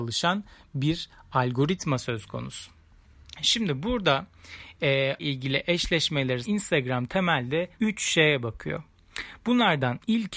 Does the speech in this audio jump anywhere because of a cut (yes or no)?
yes